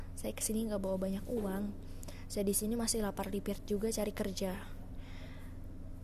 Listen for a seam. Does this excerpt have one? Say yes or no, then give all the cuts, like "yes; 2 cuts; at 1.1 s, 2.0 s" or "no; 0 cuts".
no; 0 cuts